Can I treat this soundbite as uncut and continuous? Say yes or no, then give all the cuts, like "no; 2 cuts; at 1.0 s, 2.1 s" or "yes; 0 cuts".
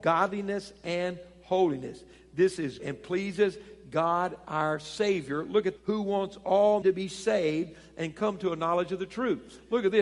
no; 3 cuts; at 2.8 s, 5.8 s, 6.8 s